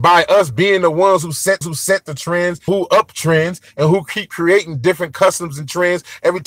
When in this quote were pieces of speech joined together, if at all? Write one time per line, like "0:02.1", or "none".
0:01.6
0:02.7